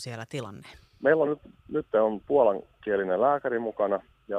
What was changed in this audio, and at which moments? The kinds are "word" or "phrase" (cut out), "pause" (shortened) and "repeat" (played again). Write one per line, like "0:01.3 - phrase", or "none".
none